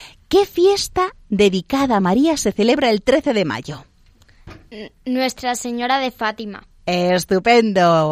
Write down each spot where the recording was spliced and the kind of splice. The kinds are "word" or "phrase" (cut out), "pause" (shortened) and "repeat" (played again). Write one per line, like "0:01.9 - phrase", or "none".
none